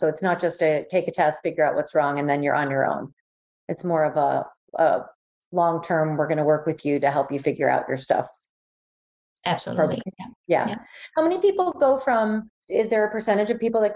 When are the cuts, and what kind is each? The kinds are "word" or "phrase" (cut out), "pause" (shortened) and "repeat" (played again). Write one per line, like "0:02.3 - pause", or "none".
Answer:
none